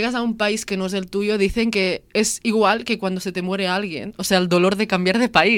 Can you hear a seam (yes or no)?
no